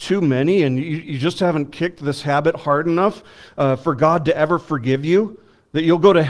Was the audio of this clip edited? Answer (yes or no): no